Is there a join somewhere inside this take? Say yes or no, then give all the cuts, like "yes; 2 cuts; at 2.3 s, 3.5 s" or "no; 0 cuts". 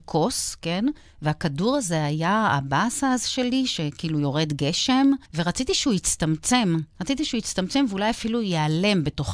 yes; 2 cuts; at 5.2 s, 6.9 s